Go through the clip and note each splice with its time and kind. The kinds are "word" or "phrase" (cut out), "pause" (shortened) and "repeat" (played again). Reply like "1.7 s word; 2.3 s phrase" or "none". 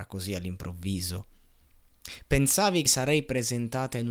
2.9 s word

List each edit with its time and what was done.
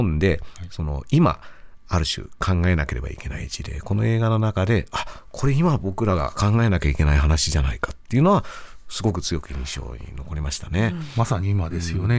none

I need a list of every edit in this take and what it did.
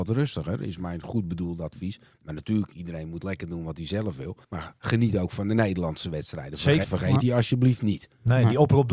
4.4 s pause; 6.8 s word

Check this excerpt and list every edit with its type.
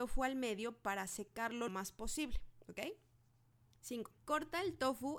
1.7 s word; 4.2 s pause

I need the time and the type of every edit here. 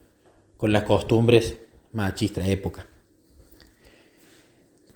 2.4 s word

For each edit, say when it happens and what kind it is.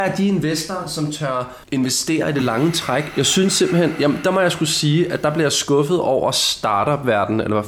1.6 s pause

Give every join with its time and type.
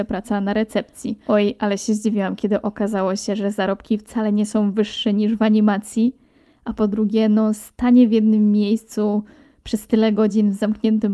none

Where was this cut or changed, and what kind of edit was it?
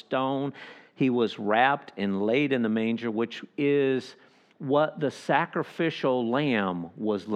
none

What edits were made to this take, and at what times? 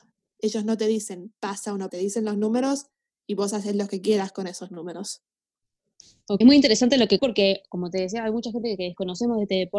1.9 s word; 6.4 s word; 7.2 s word

